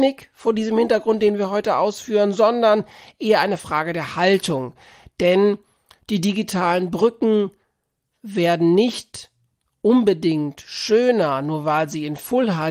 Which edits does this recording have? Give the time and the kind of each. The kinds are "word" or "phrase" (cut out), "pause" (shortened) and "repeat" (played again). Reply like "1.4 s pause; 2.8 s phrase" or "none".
none